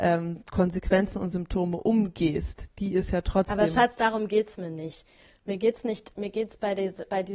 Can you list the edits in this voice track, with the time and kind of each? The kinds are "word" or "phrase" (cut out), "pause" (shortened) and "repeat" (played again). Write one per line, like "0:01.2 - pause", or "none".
none